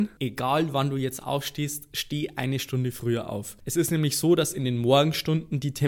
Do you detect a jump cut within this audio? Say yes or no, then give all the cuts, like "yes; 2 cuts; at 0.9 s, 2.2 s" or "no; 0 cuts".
no; 0 cuts